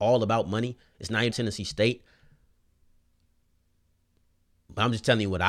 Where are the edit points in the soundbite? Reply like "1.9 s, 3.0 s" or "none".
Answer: 1.3 s